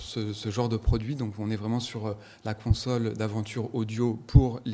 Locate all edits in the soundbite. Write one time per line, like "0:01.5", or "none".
none

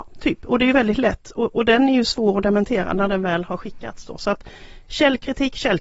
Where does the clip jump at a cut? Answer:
none

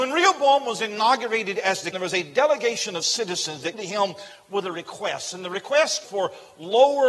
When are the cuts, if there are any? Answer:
0:01.9
0:03.7
0:06.0

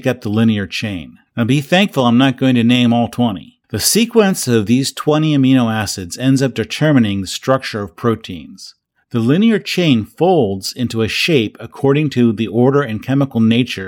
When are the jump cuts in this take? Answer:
0:01.3
0:03.6
0:08.8

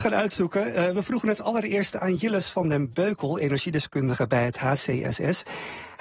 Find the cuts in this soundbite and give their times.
none

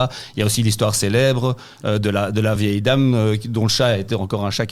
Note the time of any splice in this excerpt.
none

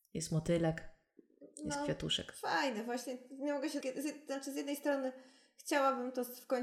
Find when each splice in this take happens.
0:03.8

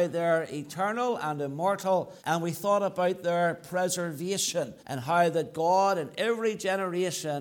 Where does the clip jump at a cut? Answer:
0:02.2
0:04.8

